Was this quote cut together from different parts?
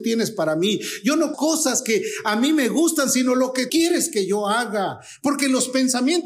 yes; 2 cuts; at 1.3 s, 3.7 s

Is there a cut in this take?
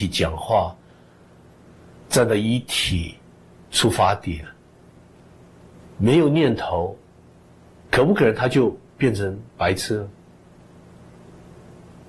no; 0 cuts

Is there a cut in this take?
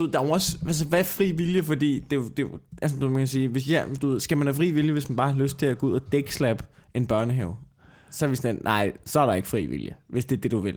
no; 0 cuts

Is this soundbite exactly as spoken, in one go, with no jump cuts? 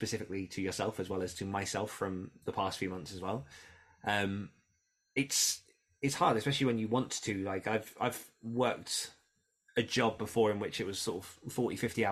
yes; 0 cuts

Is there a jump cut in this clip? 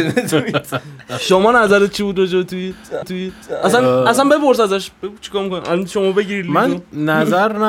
yes; 1 cut; at 3.0 s

